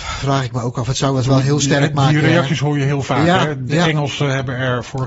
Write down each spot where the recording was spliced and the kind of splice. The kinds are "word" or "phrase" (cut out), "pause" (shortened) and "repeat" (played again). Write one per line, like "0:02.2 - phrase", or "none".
none

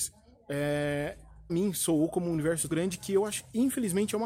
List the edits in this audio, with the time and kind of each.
0:01.5 - word
0:02.7 - word

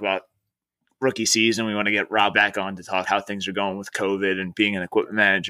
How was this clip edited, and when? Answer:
0:02.3 - word
0:03.1 - word

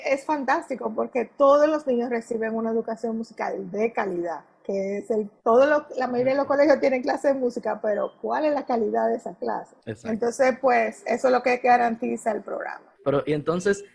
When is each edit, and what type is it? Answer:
0:05.4 - pause
0:09.8 - pause
0:13.0 - pause

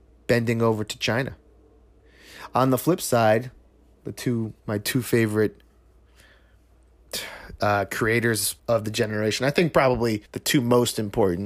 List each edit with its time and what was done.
0:08.6 - pause
0:10.3 - pause

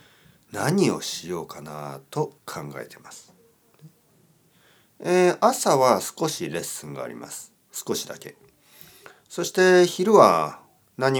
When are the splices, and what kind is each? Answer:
0:02.4 - pause

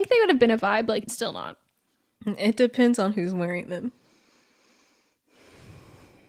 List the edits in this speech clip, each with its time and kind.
0:01.0 - word

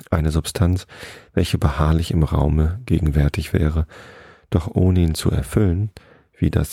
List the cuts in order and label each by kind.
none

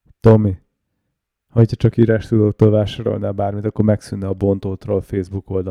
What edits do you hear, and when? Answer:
none

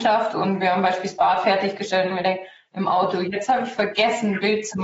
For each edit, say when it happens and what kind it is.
none

